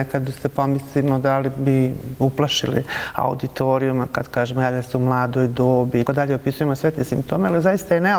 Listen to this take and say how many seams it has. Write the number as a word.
one